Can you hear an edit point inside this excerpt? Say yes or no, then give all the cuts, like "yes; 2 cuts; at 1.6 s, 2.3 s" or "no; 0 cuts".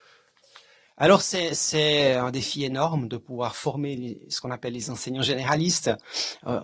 no; 0 cuts